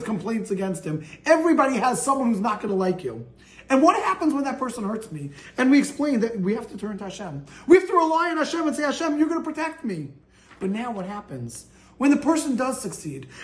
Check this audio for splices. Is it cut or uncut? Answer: uncut